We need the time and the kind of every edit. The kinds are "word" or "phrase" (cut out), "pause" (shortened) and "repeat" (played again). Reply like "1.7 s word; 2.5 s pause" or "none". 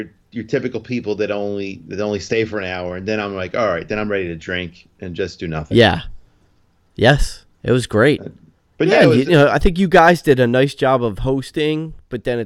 7.5 s pause; 8.6 s pause